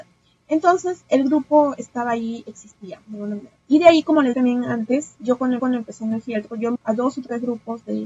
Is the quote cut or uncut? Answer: cut